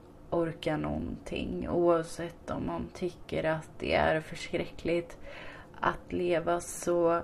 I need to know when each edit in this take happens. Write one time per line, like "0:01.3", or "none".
0:05.7

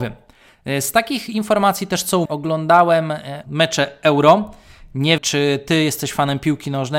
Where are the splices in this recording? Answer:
0:02.3
0:03.4
0:05.2

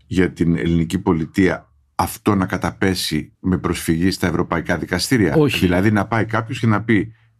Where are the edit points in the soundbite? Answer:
0:03.3

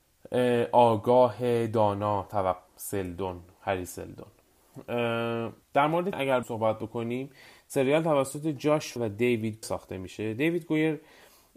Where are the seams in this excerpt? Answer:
0:02.7
0:05.6
0:06.1
0:06.4
0:09.0
0:09.6

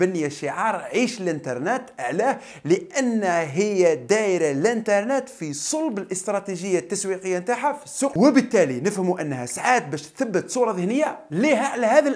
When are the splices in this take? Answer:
0:08.1

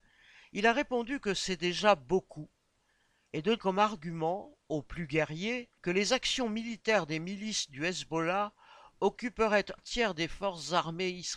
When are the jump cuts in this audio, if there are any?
0:03.6
0:05.8
0:09.8

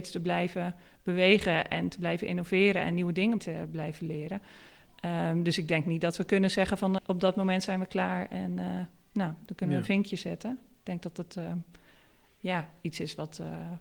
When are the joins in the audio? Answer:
0:03.4
0:07.0

